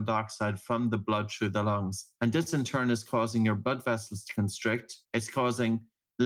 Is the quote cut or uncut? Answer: cut